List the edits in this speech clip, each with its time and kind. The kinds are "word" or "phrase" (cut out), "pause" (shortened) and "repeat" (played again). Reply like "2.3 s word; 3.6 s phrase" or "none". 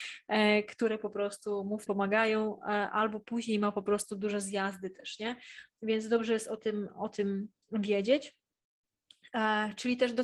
1.9 s word